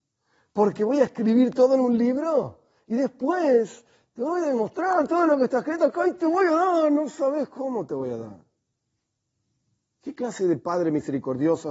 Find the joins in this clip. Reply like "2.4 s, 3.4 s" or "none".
none